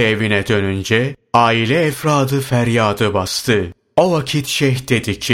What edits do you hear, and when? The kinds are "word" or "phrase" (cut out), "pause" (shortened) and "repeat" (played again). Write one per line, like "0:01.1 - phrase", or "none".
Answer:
none